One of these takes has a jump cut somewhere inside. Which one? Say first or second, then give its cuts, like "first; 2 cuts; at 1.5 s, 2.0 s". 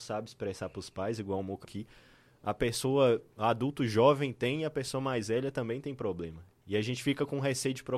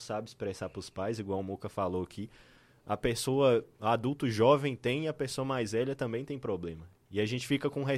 first; 1 cut; at 1.6 s